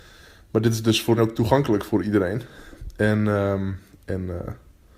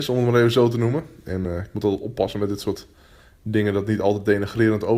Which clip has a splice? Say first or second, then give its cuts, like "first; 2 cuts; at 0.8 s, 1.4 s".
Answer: first; 1 cut; at 1.2 s